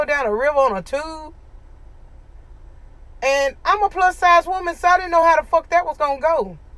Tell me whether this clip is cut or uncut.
uncut